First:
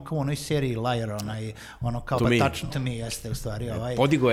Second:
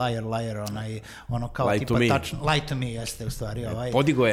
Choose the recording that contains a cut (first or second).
first